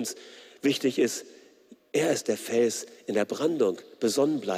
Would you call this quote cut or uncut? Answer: uncut